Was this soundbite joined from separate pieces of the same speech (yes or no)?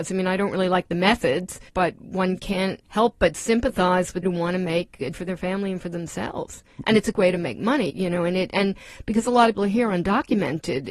yes